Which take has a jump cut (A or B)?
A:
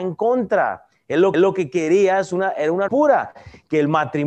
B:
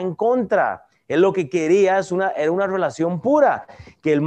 A